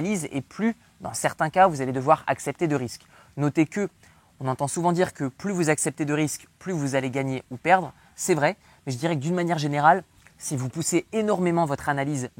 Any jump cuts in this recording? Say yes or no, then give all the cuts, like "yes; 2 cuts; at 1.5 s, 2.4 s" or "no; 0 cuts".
no; 0 cuts